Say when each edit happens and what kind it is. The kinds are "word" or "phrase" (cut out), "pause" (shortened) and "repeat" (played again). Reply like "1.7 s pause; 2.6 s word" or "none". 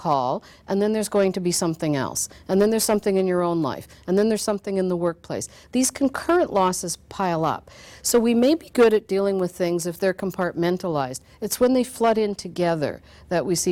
none

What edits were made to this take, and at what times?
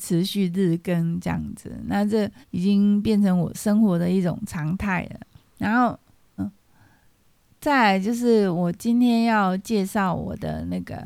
2.4 s pause; 5.4 s pause; 6.4 s word

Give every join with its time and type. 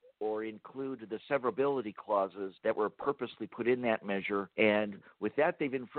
2.6 s pause; 4.5 s pause

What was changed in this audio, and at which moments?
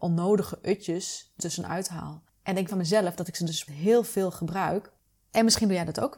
1.4 s word; 2.7 s word; 3.7 s word

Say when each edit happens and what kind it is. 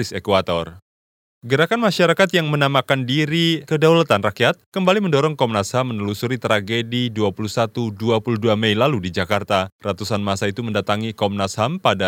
none

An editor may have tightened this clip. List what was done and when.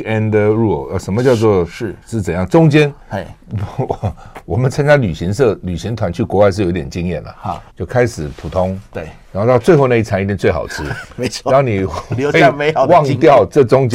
2.0 s pause; 7.7 s pause

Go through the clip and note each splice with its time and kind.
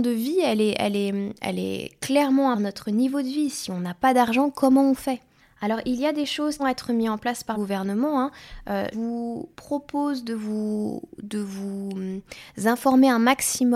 2.5 s phrase; 5.4 s pause; 6.6 s phrase; 7.5 s word; 8.9 s word; 9.5 s pause

